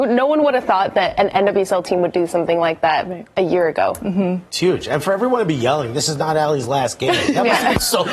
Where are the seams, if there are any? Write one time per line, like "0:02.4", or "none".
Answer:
none

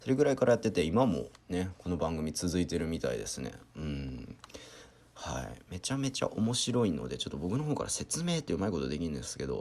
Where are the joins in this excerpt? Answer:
none

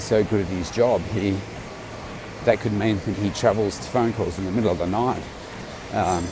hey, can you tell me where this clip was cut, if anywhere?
0:02.4
0:03.1
0:03.8

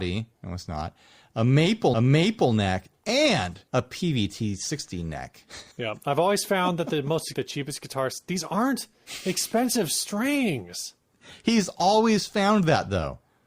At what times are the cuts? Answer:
0:01.9
0:03.7
0:05.7
0:07.3

